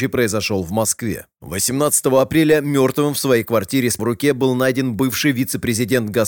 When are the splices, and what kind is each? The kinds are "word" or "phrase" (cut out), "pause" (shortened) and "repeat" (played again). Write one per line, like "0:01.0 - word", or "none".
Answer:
0:04.0 - word